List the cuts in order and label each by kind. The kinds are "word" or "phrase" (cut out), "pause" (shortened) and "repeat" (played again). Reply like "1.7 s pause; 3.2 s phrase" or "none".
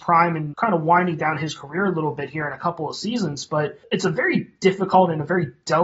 none